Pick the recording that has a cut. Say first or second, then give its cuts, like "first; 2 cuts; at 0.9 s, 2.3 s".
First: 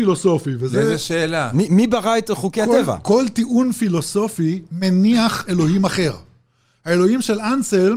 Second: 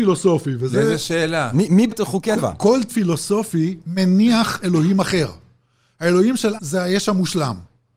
second; 4 cuts; at 1.9 s, 2.4 s, 2.9 s, 6.6 s